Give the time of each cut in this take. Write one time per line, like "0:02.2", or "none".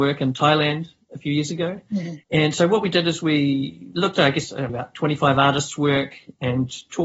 0:02.2
0:04.7

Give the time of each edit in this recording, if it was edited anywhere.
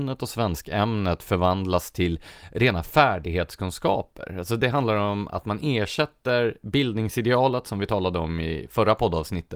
none

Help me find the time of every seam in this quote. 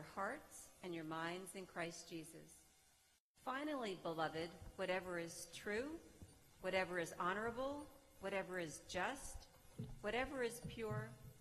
none

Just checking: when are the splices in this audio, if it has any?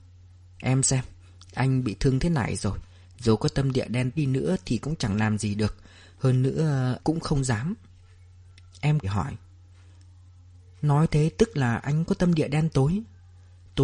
0:04.2
0:07.0
0:09.0

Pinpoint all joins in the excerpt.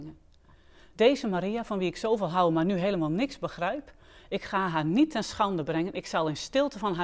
none

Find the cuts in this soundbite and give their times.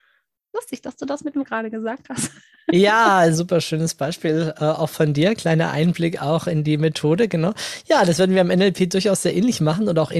0:01.4
0:03.3

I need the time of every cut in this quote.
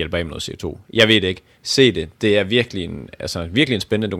none

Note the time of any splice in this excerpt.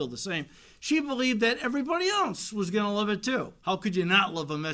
0:03.6

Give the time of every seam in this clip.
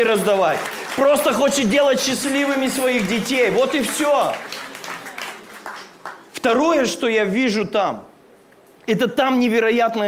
none

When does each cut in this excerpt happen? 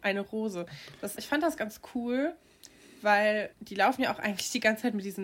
0:01.2
0:03.5

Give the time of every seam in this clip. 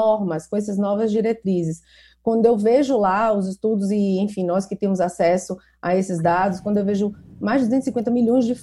none

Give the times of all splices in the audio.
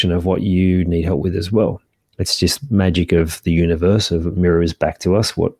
0:02.0

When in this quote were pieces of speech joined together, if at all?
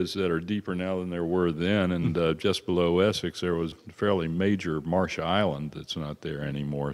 0:03.7

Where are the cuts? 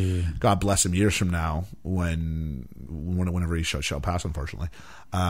0:02.9

